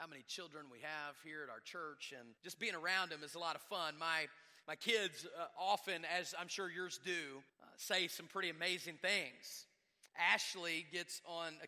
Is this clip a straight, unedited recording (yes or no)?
no